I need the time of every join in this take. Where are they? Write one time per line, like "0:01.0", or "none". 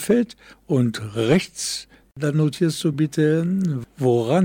none